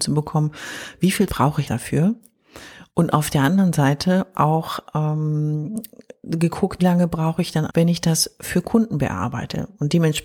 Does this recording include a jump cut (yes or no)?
yes